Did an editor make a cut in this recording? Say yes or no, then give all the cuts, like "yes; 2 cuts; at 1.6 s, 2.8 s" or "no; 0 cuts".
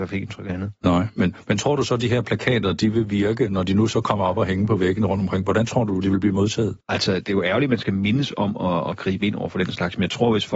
yes; 1 cut; at 6.8 s